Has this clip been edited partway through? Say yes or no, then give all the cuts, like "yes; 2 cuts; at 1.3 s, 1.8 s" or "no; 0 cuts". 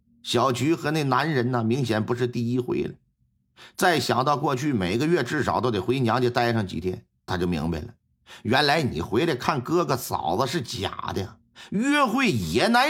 yes; 1 cut; at 7.3 s